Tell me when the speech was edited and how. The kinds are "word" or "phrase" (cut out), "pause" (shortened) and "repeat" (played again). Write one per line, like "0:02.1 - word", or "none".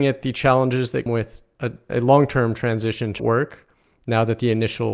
0:01.1 - word
0:01.9 - word
0:03.2 - word